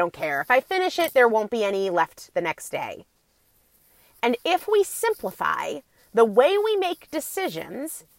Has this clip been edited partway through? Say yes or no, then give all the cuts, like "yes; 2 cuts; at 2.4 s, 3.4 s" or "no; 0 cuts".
no; 0 cuts